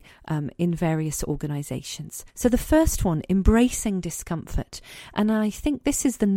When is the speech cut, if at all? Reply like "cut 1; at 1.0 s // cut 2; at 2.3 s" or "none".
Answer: cut 1; at 2.3 s

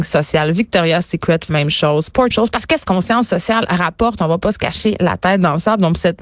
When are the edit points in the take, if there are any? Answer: cut 1; at 1.5 s // cut 2; at 2.3 s // cut 3; at 2.8 s

